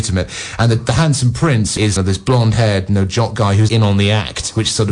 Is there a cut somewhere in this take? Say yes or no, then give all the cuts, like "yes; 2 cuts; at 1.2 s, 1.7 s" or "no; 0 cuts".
yes; 2 cuts; at 2.0 s, 3.7 s